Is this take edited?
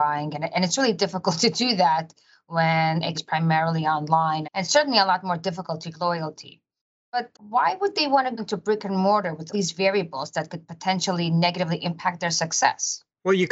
yes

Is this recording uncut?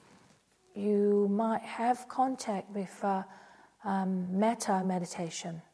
yes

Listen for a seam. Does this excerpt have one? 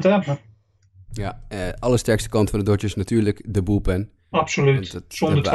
no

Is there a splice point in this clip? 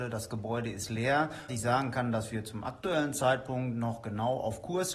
yes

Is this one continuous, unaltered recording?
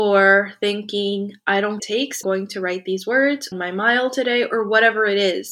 no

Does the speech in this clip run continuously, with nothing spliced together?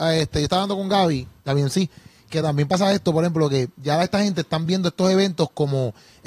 yes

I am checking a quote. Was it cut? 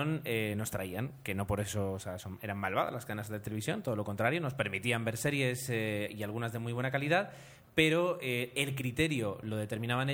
no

